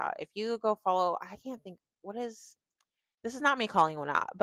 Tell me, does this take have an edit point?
no; 0 cuts

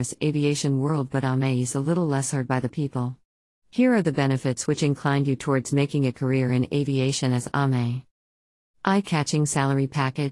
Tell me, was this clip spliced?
no; 0 cuts

